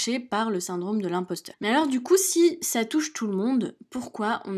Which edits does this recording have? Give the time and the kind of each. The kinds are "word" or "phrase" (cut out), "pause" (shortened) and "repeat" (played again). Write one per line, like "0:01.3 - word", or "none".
none